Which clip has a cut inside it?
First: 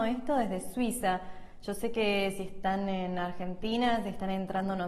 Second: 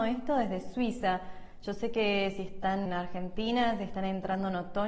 second; 1 cut; at 2.9 s

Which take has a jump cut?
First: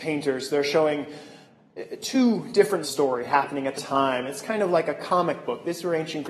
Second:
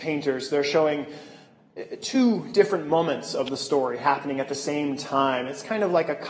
first; 2 cuts; at 2.8 s, 3.8 s

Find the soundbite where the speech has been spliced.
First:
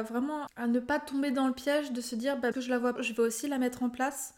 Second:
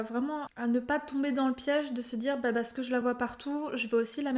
first; 2 cuts; at 2.5 s, 3.0 s

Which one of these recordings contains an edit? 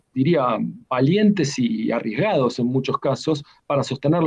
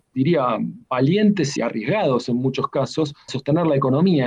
second; 2 cuts; at 1.6 s, 3.3 s

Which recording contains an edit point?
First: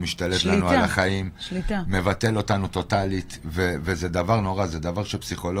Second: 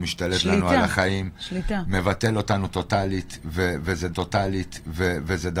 second; 1 cut; at 4.1 s

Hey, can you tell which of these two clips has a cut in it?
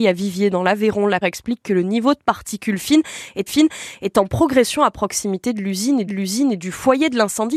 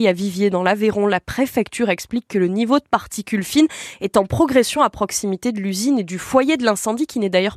first; 3 cuts; at 1.2 s, 3.5 s, 6.1 s

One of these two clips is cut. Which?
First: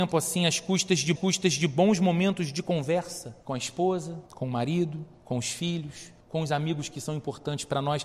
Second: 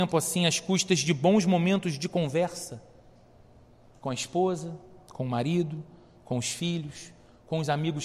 first; 5 cuts; at 1.2 s, 3.4 s, 4.3 s, 5.1 s, 6.2 s

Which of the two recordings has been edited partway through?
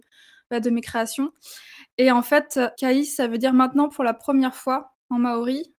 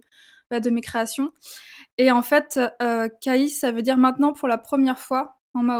first; 1 cut; at 2.8 s

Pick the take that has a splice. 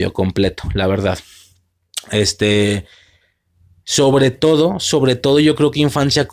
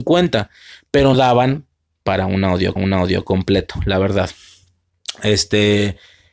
second; 2 cuts; at 1.1 s, 2.8 s

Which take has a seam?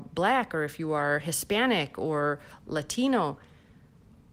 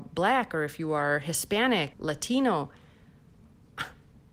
second; 1 cut; at 1.9 s

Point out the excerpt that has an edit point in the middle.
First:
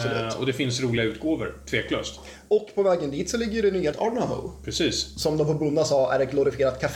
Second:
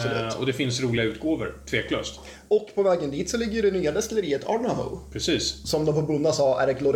first; 1 cut; at 3.9 s

